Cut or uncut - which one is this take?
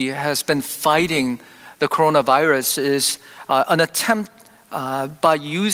uncut